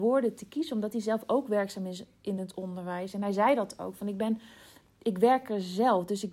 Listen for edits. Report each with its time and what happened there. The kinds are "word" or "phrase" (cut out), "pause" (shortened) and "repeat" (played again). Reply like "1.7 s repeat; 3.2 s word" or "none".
none